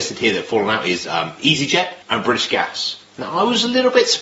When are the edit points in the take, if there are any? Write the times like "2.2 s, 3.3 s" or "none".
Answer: 2.0 s